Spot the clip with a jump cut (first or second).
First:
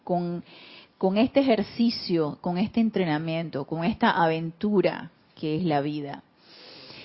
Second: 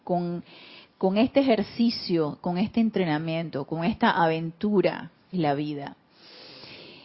second